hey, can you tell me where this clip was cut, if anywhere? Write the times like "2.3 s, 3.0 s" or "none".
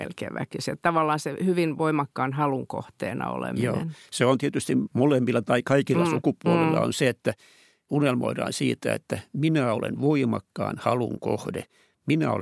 none